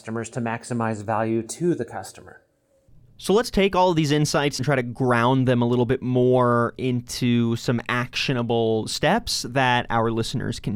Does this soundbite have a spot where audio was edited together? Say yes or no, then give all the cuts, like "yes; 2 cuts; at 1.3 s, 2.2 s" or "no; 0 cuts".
yes; 1 cut; at 4.6 s